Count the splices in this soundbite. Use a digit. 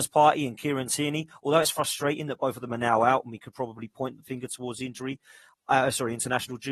0